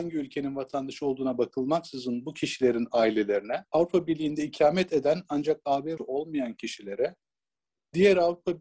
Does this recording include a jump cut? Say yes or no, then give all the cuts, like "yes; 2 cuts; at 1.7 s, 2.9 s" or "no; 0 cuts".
yes; 2 cuts; at 3.7 s, 6.0 s